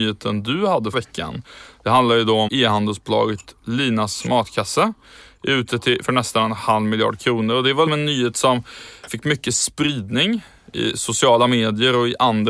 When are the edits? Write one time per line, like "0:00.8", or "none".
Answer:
0:00.9
0:02.5
0:06.0
0:07.9
0:09.1